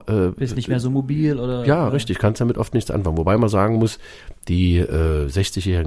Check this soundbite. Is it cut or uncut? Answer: uncut